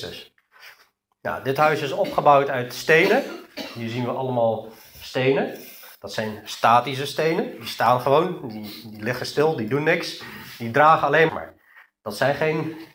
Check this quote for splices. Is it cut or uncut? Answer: cut